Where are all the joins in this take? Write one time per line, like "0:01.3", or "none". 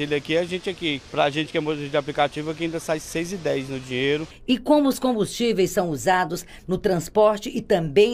0:01.1